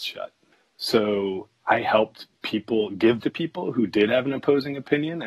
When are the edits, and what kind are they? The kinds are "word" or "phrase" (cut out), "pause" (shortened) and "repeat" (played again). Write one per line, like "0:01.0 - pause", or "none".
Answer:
0:03.2 - word